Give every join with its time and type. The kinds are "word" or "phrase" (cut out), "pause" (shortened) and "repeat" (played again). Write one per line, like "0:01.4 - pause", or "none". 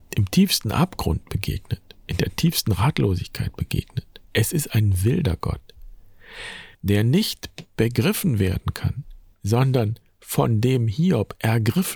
0:04.2 - pause
0:06.7 - pause
0:09.3 - pause